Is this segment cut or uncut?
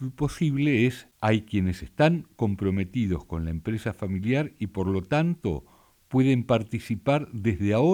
uncut